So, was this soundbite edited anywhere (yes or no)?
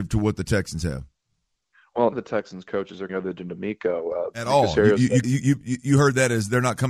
yes